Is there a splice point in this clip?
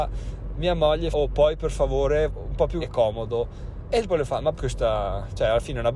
yes; 5 cuts; at 1.1 s, 2.3 s, 2.8 s, 4.1 s, 4.6 s

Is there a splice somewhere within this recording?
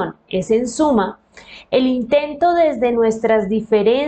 no; 0 cuts

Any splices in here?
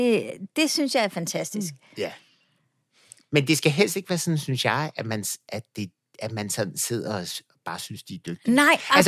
no; 0 cuts

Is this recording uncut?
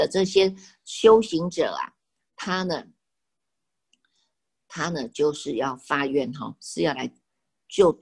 yes; 0 cuts

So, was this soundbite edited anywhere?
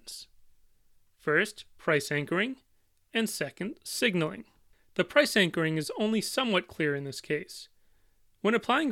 no; 0 cuts

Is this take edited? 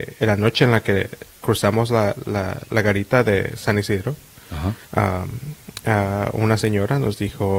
yes; 1 cut; at 4.8 s

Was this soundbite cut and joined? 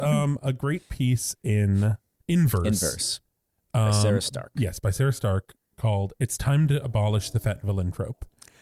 no; 0 cuts

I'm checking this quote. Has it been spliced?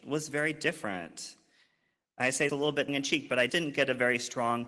yes; 3 cuts; at 2.5 s, 2.9 s, 3.5 s

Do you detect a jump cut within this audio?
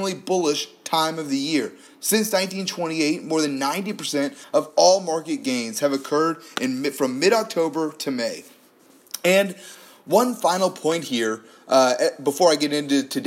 no; 0 cuts

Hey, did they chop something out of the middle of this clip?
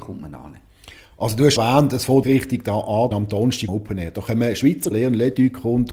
yes; 5 cuts; at 1.6 s, 2.2 s, 3.1 s, 3.7 s, 4.9 s

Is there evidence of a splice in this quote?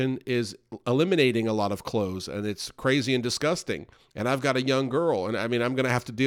yes; 1 cut; at 4.0 s

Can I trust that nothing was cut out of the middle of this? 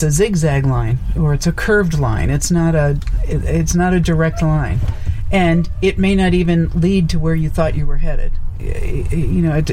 yes; 0 cuts

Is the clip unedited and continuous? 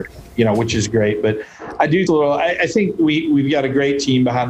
no; 1 cut; at 2.1 s

